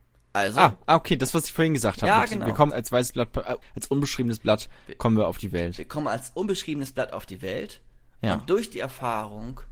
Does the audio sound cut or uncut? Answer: cut